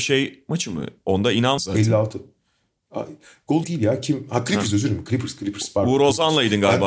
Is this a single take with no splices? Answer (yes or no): no